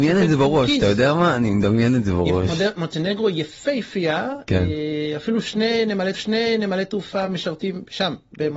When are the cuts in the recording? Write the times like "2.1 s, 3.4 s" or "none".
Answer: 6.1 s